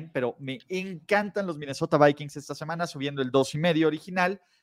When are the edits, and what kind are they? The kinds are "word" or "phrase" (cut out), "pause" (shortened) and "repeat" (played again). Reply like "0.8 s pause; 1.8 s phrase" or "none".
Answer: none